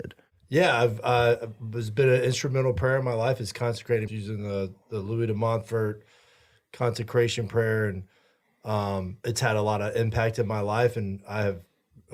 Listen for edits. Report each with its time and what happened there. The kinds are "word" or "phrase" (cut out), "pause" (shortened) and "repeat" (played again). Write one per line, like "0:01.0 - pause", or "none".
0:04.1 - word

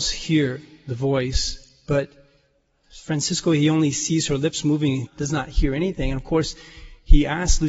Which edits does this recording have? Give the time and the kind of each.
0:05.1 - word

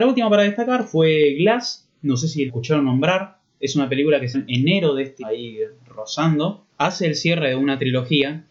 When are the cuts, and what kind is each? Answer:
0:02.5 - word
0:04.3 - word
0:05.2 - word
0:06.7 - pause

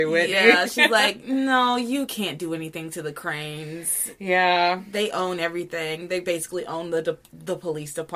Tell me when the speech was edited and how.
none

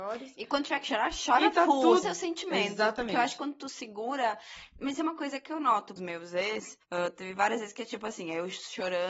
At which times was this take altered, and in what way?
0:02.0 - phrase
0:06.0 - phrase
0:06.8 - pause

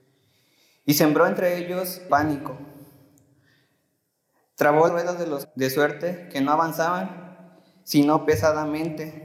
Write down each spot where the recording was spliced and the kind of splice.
0:02.1 - word
0:04.9 - word
0:05.4 - word

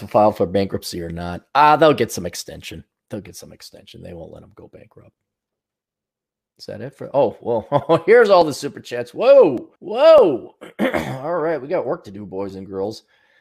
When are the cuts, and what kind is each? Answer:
0:09.8 - pause

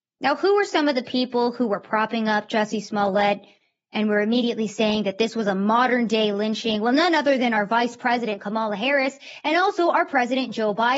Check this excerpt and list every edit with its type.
none

